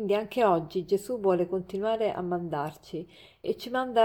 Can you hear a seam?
no; 0 cuts

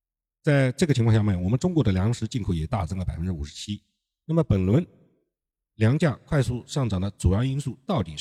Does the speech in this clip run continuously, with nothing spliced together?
yes; 0 cuts

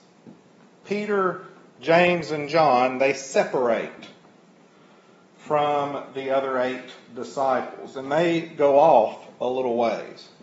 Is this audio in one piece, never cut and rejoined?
yes; 0 cuts

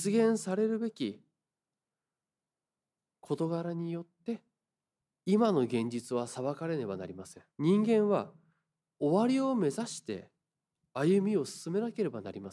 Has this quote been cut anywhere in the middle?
yes; 1 cut; at 7.5 s

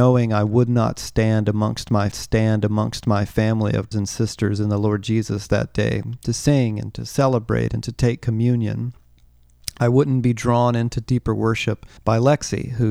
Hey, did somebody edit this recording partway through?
yes; 3 cuts; at 2.1 s, 3.9 s, 12.0 s

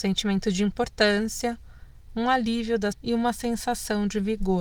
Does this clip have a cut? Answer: yes; 1 cut; at 2.9 s

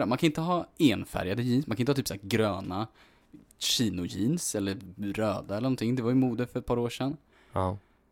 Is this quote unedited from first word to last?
yes; 0 cuts

